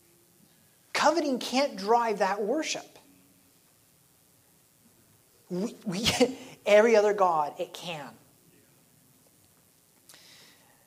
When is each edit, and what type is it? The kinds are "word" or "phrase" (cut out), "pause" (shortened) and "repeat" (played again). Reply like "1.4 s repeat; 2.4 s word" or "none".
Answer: none

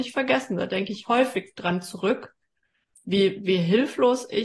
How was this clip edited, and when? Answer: none

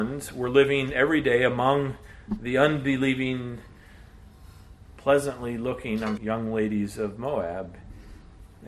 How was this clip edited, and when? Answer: 6.2 s word

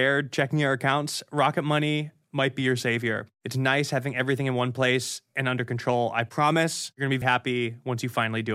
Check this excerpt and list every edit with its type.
7.2 s word

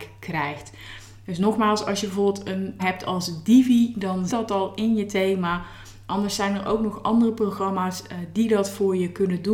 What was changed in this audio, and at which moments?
2.8 s word; 4.3 s word

